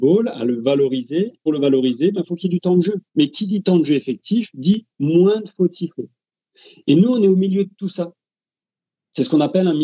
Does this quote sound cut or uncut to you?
cut